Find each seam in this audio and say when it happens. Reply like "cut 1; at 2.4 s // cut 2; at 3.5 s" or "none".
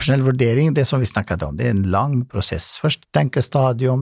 cut 1; at 3.0 s